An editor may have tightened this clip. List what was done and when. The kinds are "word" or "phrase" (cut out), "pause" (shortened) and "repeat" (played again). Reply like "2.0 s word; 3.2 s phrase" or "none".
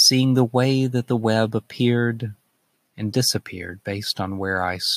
none